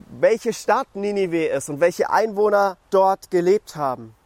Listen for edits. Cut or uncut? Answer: cut